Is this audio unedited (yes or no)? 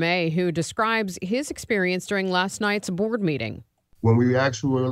yes